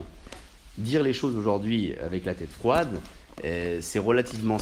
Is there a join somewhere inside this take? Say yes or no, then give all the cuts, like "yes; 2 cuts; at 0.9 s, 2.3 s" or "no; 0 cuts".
no; 0 cuts